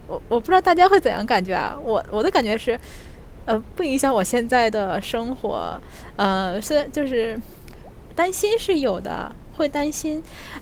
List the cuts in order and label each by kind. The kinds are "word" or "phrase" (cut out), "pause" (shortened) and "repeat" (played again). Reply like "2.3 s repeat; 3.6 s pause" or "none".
none

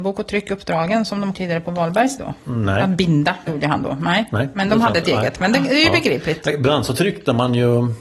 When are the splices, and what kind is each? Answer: 1.3 s phrase; 2.2 s word; 3.5 s word

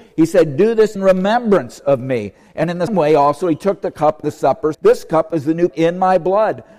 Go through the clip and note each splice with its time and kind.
1.0 s word; 2.9 s word; 4.2 s word; 4.7 s word; 5.7 s word

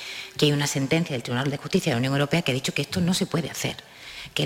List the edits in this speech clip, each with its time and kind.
none

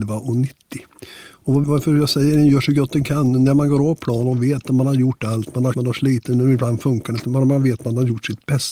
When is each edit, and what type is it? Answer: 1.6 s word; 5.7 s word

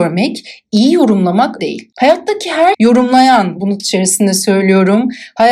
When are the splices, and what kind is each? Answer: 1.6 s phrase; 2.7 s word; 3.8 s word

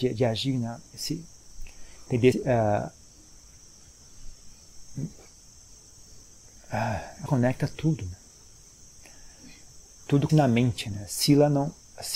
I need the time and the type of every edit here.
2.3 s word; 7.3 s word; 10.3 s word

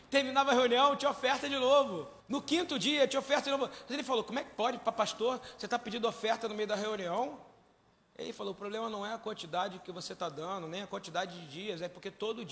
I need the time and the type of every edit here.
2.2 s pause; 7.9 s pause

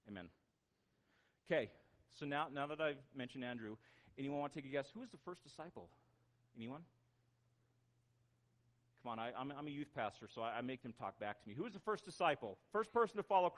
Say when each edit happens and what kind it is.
none

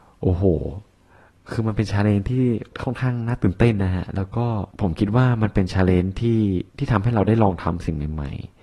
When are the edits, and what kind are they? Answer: 4.7 s pause; 6.7 s pause

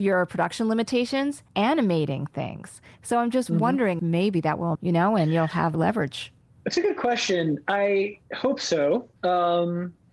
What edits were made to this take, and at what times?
1.5 s pause; 4.0 s word; 4.7 s phrase; 5.7 s word; 6.4 s pause; 8.3 s pause; 9.2 s pause

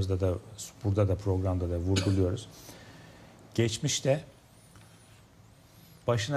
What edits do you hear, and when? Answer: none

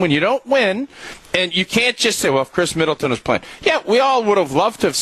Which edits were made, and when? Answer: none

